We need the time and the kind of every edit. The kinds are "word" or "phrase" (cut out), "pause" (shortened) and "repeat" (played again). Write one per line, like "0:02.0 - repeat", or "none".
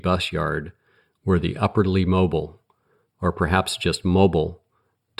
none